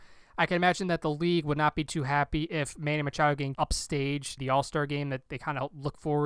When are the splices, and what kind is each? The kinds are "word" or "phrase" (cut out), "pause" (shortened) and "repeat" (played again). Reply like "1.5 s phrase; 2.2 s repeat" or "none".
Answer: 3.5 s word; 4.4 s word; 5.3 s word